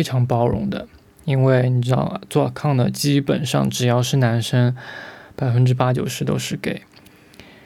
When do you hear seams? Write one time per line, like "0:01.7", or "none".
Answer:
none